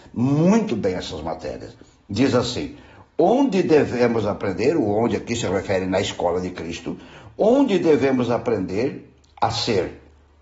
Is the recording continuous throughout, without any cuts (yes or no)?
yes